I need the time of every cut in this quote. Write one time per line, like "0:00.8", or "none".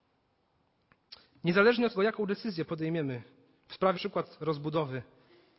0:01.9
0:03.9